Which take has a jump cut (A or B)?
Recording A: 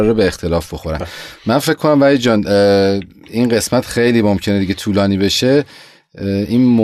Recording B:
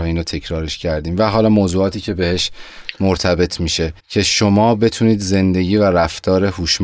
B